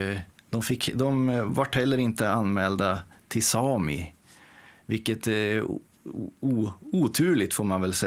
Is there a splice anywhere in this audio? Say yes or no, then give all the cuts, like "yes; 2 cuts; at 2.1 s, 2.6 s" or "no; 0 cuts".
no; 0 cuts